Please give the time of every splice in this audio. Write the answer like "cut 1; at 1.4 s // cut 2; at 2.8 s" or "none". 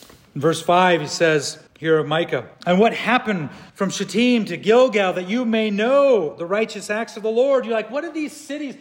cut 1; at 1.7 s // cut 2; at 2.5 s // cut 3; at 3.7 s